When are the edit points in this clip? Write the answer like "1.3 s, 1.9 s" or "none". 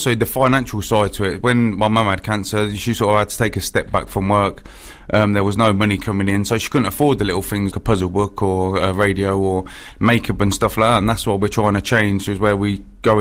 7.7 s